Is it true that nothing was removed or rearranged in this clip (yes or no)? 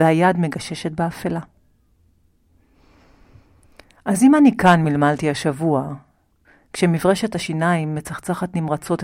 yes